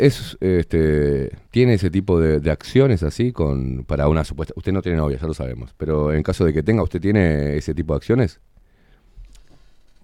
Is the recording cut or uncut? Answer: cut